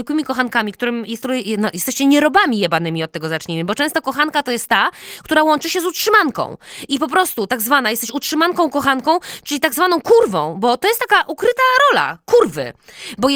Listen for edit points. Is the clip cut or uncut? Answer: uncut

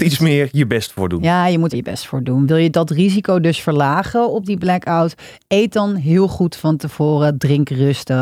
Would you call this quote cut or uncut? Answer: cut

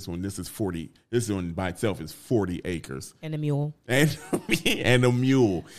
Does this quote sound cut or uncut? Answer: uncut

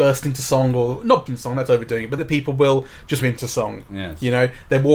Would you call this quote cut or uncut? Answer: cut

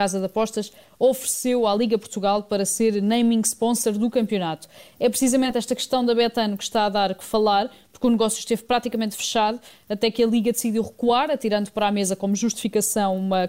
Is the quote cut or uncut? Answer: uncut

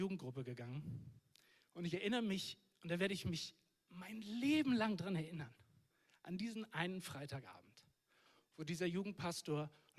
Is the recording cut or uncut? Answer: uncut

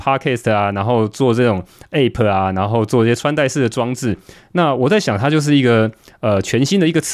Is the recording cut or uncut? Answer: uncut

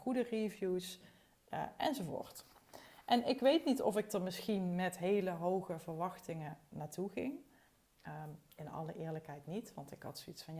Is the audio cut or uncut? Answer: uncut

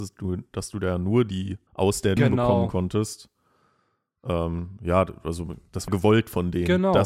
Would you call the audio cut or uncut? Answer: cut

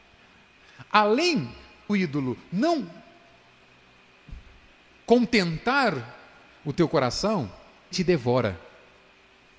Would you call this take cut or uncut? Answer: cut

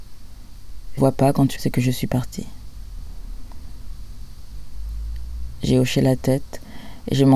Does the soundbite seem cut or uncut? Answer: cut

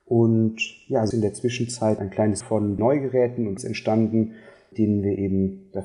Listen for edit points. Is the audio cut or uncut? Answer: cut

